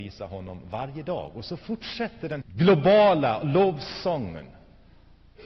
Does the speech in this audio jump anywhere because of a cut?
yes; 1 cut; at 2.4 s

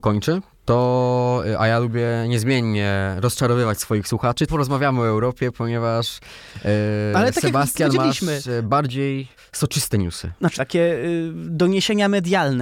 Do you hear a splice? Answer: yes; 3 cuts; at 4.5 s, 9.4 s, 10.5 s

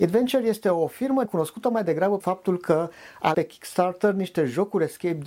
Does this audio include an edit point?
yes; 3 cuts; at 1.2 s, 2.2 s, 3.3 s

